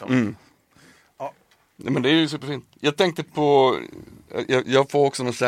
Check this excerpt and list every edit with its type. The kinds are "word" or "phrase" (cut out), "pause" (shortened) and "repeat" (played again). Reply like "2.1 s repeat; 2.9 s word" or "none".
none